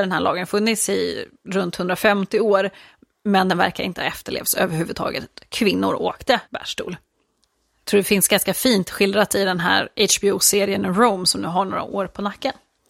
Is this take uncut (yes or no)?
no